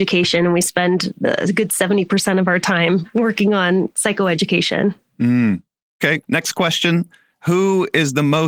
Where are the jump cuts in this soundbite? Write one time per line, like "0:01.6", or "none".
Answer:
0:06.2